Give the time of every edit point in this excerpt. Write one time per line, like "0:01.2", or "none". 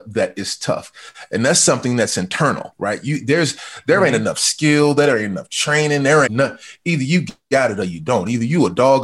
0:06.3